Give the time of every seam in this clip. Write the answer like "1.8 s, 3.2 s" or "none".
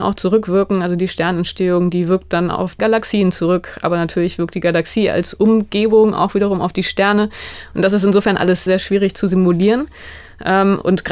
2.8 s, 8.7 s